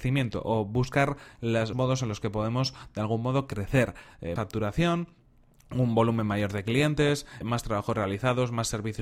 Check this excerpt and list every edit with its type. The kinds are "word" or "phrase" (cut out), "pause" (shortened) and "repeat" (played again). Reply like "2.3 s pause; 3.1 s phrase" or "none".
1.7 s word; 4.4 s word; 7.4 s word